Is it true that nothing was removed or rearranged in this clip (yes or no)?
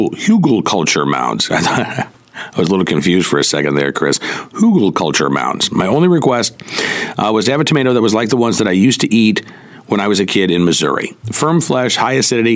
no